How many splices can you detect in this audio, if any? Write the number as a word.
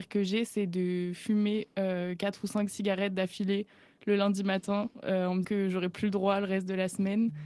one